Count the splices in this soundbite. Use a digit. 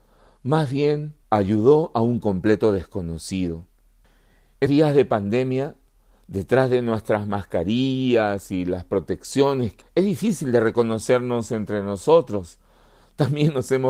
3